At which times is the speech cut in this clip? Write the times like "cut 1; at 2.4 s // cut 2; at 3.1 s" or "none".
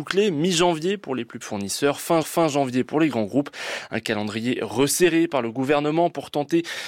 cut 1; at 1.4 s // cut 2; at 2.2 s